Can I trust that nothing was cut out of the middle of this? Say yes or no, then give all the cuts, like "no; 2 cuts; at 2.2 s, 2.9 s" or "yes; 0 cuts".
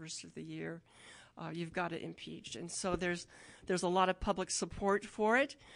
yes; 0 cuts